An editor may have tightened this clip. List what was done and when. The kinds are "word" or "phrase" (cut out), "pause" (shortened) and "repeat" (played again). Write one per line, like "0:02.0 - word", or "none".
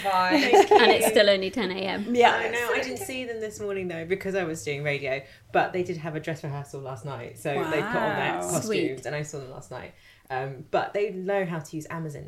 none